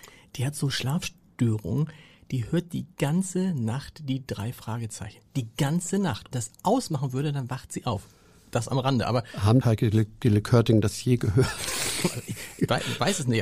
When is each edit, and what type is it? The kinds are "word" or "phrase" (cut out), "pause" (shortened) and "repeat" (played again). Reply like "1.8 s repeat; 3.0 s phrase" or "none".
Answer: 6.3 s phrase; 9.6 s phrase